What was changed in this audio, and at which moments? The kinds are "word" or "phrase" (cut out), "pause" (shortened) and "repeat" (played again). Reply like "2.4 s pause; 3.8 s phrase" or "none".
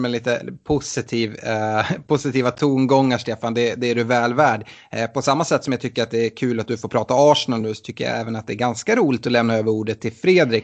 none